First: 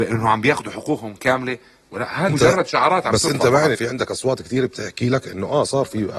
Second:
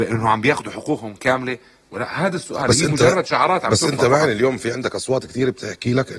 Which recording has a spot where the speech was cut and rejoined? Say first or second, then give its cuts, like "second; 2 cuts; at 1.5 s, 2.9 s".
first; 2 cuts; at 2.3 s, 3.7 s